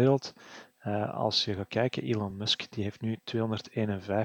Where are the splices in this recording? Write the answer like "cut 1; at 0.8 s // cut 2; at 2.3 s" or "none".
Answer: none